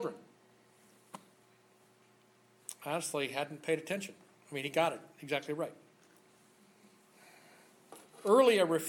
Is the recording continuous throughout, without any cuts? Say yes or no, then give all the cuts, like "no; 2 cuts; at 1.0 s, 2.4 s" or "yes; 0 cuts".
yes; 0 cuts